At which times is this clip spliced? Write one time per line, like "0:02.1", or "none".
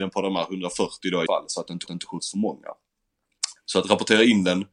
0:01.3
0:01.9